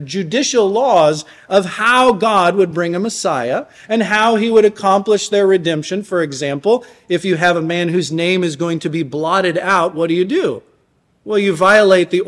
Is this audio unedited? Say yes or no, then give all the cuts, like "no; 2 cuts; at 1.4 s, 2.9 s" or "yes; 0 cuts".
yes; 0 cuts